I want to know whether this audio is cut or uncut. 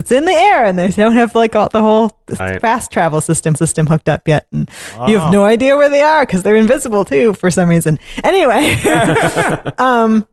cut